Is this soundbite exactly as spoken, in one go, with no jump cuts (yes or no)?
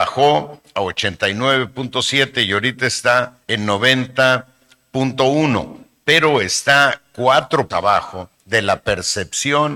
no